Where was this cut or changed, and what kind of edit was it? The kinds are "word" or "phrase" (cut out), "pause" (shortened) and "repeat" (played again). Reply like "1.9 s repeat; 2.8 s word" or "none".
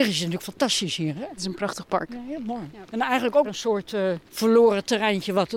1.4 s word; 2.9 s pause; 3.4 s word; 4.3 s pause